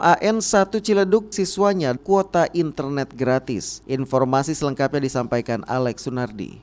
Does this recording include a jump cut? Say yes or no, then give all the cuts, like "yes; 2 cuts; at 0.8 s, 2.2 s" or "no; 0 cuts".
yes; 3 cuts; at 1.3 s, 2.0 s, 3.8 s